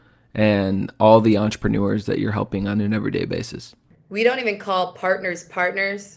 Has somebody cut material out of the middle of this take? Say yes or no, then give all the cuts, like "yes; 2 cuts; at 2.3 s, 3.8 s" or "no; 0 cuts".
no; 0 cuts